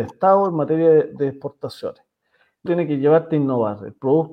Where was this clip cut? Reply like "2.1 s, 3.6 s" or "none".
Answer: 2.7 s